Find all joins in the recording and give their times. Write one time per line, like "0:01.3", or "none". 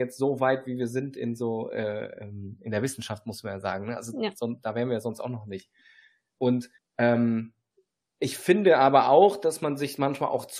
0:06.8